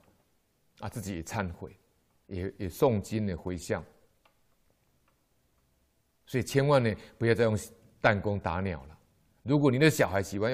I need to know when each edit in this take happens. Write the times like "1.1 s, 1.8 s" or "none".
none